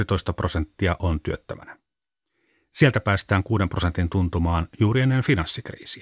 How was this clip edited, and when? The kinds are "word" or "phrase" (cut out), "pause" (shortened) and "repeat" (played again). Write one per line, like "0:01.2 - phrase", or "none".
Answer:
none